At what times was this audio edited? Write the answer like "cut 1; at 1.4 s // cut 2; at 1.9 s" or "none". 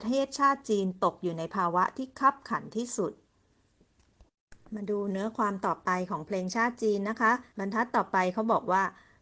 cut 1; at 4.6 s // cut 2; at 7.5 s